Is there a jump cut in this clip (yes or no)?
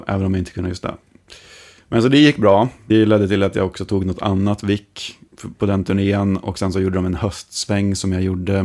no